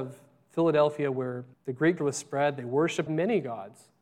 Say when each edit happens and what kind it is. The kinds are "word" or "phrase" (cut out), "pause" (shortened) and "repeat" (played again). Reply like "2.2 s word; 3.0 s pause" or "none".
1.5 s pause; 2.0 s word; 3.1 s phrase

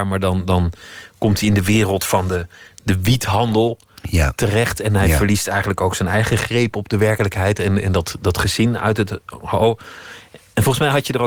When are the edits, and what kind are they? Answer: none

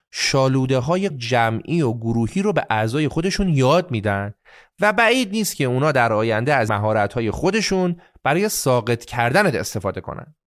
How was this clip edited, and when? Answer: 1.1 s word; 6.7 s word

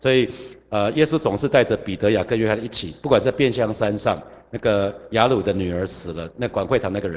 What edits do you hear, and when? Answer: none

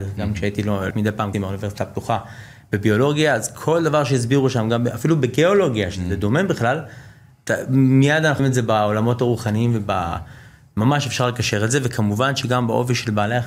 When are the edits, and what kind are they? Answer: 0.9 s word; 1.3 s word; 8.4 s word

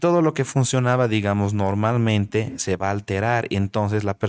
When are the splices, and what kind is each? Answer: none

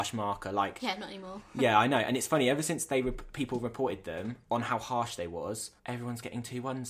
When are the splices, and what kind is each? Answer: 5.8 s pause

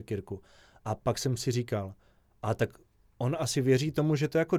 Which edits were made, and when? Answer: none

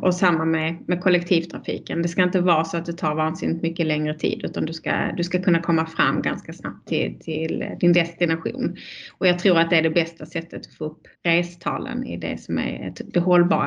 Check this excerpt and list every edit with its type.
11.1 s pause

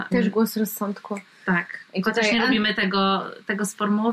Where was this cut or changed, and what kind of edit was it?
none

